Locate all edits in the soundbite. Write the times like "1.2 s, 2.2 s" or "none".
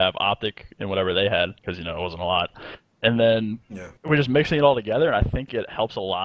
1.6 s, 4.0 s